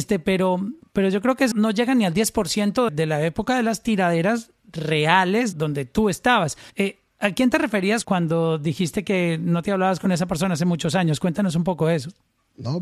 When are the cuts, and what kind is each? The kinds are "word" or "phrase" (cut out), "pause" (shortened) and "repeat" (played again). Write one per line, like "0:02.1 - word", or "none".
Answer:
0:01.5 - word
0:02.9 - word
0:05.5 - word
0:06.7 - pause
0:08.0 - word